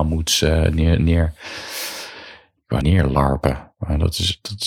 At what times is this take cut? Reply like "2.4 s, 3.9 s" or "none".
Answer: 2.8 s